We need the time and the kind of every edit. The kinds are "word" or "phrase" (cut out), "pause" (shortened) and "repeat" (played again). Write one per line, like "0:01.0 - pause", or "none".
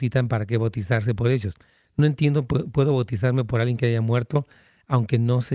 none